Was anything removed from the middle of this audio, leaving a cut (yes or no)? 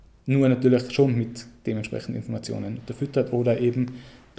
no